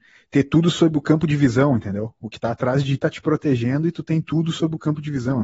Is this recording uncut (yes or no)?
no